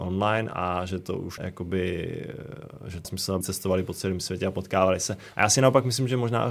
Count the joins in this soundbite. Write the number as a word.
three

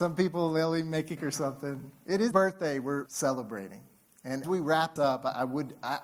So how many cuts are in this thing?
five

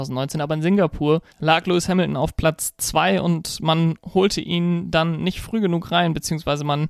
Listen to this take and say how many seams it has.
one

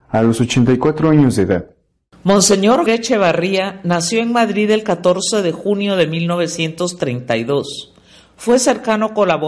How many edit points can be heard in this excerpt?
one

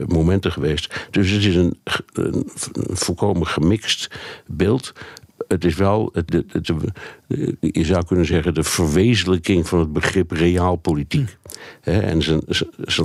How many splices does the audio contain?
two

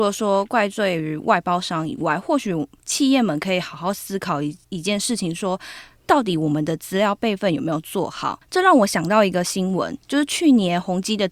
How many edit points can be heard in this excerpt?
one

